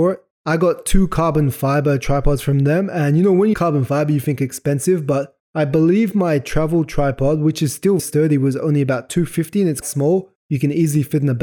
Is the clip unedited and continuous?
no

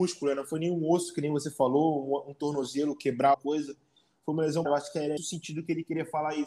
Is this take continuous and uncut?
no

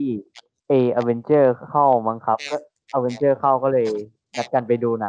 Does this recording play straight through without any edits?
yes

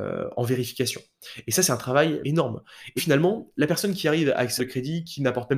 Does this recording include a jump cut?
yes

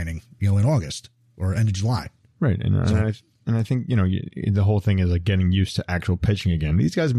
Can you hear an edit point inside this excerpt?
no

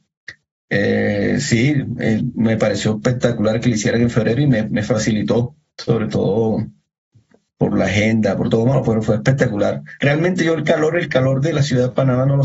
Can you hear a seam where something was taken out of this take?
no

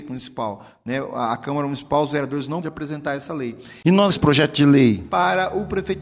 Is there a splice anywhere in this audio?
yes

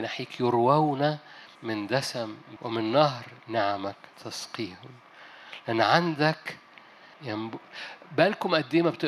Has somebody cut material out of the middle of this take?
yes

